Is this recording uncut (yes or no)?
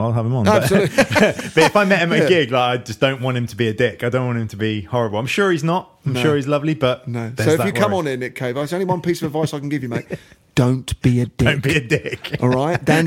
yes